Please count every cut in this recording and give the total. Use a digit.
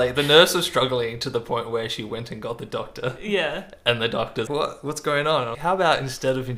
2